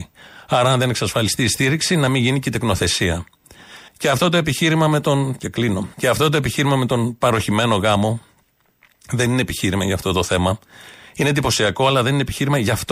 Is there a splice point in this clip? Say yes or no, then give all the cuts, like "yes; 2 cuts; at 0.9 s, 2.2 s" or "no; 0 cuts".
yes; 3 cuts; at 3.9 s, 5.4 s, 5.9 s